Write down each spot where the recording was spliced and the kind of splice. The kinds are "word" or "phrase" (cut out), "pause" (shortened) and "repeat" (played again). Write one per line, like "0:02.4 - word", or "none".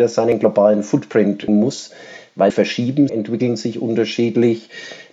0:01.5 - word
0:02.5 - word
0:03.1 - phrase